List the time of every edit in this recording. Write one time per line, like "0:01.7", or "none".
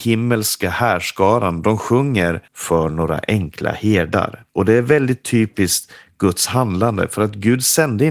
0:02.5
0:04.5

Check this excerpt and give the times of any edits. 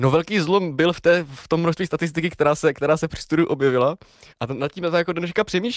0:04.3

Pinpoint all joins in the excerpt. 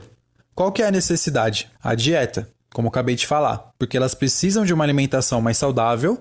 0:01.8
0:03.8

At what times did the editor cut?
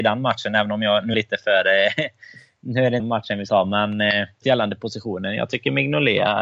0:01.1
0:03.0
0:03.5
0:04.4

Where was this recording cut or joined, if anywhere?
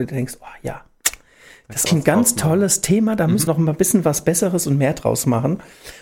0:01.9
0:03.5

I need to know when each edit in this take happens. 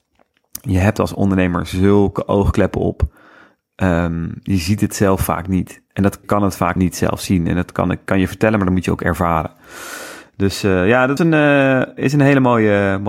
0:06.2
0:06.8
0:11.2
0:12.0

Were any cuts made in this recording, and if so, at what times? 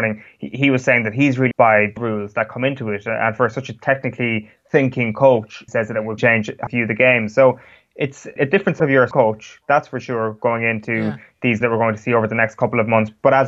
0:01.5
0:02.0
0:05.7
0:06.2
0:06.7
0:08.4
0:08.8
0:09.1
0:11.6

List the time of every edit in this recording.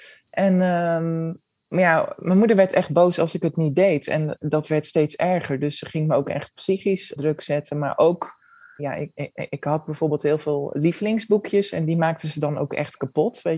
0:07.2
0:08.8

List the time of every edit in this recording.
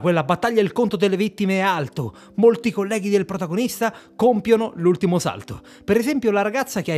none

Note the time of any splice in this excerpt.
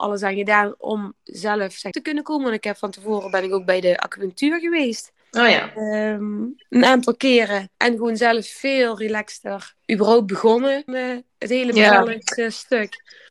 0:01.9
0:05.2
0:07.7
0:09.8
0:10.9
0:11.3

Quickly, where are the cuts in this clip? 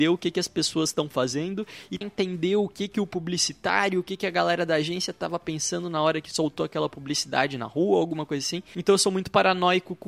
0:02.0

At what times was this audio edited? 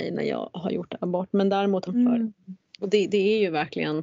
0:01.9

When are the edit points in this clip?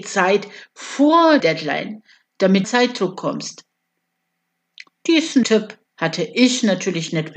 0:01.4
0:02.6
0:05.4
0:05.9

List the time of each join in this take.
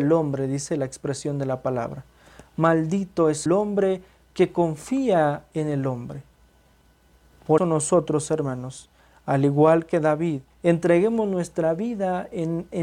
0:03.5
0:07.6
0:10.5

